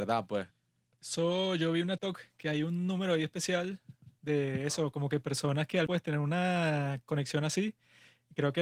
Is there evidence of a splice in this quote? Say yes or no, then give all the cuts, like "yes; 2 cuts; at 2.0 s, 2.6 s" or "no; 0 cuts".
yes; 2 cuts; at 2.0 s, 5.9 s